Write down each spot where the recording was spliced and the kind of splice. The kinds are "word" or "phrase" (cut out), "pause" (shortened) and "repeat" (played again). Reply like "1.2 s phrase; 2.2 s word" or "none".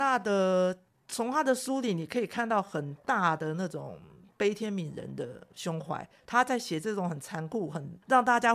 none

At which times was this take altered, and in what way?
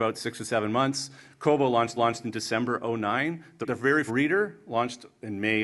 2.0 s repeat; 3.6 s word; 4.1 s phrase

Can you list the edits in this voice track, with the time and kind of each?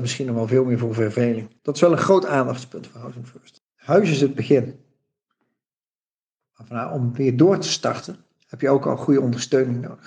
1.6 s pause; 3.7 s pause

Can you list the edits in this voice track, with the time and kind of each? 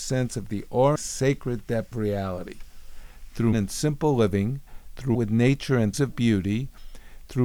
1.0 s word; 1.9 s word; 3.5 s word; 5.1 s word; 5.9 s word

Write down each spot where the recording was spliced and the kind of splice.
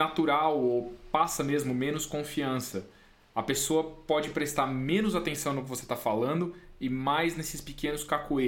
none

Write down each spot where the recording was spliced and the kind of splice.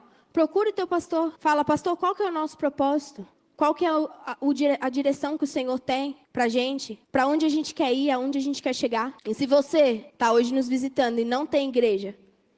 1.4 s pause; 3.3 s pause; 6.2 s pause; 7.0 s pause; 9.2 s pause; 10.1 s pause

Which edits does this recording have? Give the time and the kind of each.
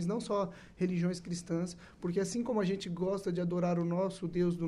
none

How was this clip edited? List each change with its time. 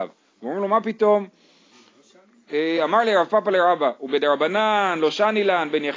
none

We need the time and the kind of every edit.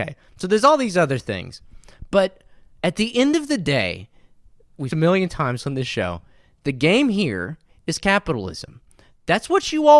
4.9 s phrase

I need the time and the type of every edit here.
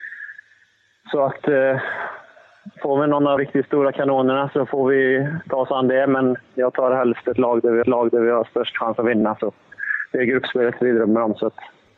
2.7 s pause; 3.4 s word; 7.8 s repeat

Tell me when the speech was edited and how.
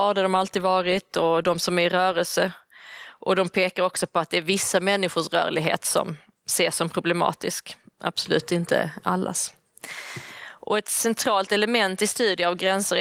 none

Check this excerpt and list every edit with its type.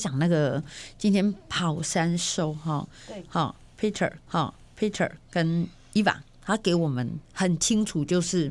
4.3 s repeat; 7.2 s pause

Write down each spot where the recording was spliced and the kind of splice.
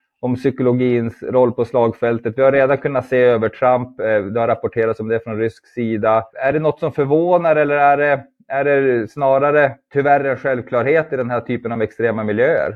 none

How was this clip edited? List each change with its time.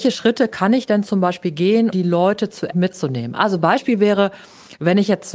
1.9 s word; 2.7 s phrase

